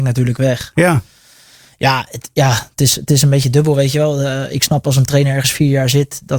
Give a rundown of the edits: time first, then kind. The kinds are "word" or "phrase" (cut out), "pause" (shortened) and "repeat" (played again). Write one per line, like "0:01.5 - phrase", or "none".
none